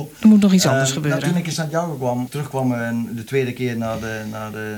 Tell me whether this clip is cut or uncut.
cut